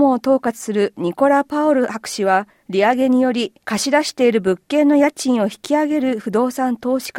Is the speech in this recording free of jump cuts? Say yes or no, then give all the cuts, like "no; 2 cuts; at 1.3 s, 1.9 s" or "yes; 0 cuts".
no; 1 cut; at 2.5 s